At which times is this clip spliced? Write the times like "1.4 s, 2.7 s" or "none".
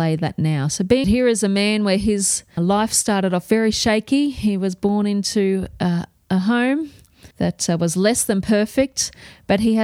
1.0 s, 2.6 s, 7.3 s